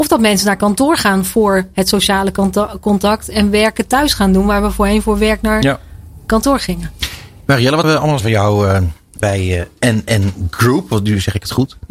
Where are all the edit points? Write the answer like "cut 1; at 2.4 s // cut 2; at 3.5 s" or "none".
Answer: cut 1; at 7.8 s // cut 2; at 8.2 s // cut 3; at 9.2 s